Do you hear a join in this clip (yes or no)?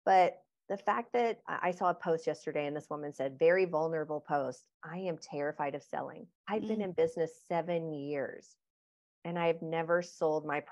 yes